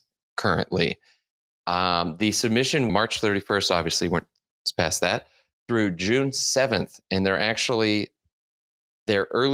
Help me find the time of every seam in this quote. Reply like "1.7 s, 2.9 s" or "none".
2.9 s